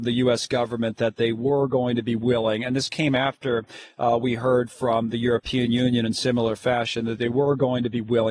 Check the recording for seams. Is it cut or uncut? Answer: uncut